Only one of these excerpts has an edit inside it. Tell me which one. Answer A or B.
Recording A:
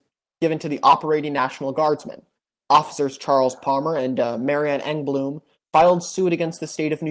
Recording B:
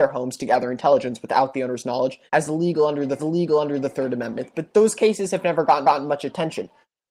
B